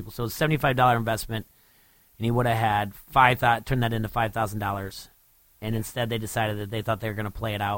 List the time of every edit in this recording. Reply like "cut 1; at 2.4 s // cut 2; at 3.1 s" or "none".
none